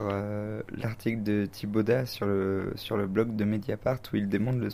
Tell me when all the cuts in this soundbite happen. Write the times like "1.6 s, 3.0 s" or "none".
none

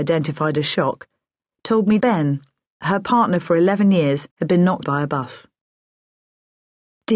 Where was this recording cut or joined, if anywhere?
2.0 s, 4.3 s, 4.8 s

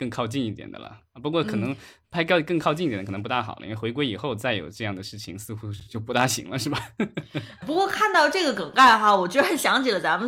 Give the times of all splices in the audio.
7.6 s

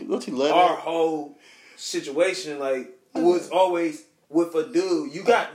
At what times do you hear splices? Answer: 3.2 s

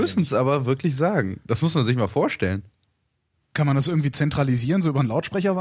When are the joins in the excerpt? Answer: none

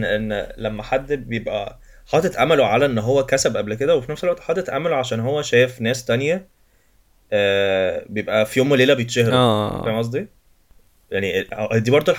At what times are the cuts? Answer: none

